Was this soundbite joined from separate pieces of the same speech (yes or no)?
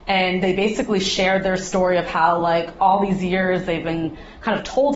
no